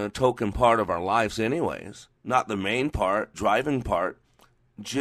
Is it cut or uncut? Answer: cut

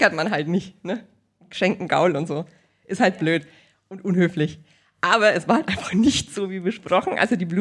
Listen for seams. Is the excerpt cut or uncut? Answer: uncut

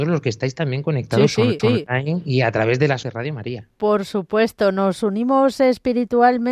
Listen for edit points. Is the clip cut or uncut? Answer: cut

